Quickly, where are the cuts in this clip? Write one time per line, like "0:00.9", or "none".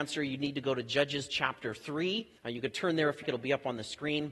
0:02.4
0:03.2